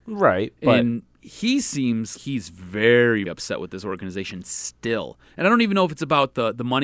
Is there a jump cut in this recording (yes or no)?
yes